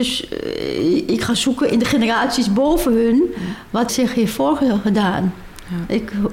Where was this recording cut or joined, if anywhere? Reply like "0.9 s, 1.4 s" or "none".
3.9 s